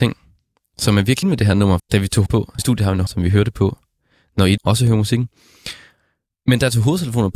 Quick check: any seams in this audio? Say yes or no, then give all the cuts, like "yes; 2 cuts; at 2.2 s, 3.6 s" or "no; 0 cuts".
yes; 6 cuts; at 1.2 s, 1.8 s, 2.3 s, 2.6 s, 3.1 s, 4.6 s